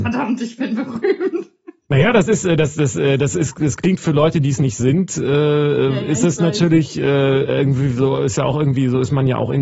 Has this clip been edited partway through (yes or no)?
no